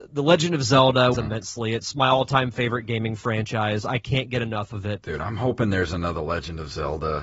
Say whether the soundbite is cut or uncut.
cut